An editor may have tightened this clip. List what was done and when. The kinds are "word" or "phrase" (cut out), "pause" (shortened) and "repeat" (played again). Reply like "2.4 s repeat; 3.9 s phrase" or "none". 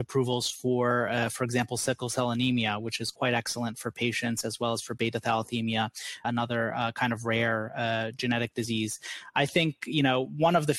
6.2 s word